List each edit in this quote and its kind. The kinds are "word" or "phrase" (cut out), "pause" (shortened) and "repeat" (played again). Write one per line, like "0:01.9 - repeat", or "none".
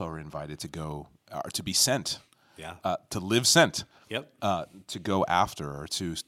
none